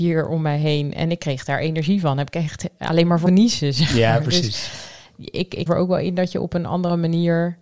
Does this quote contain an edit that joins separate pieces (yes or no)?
yes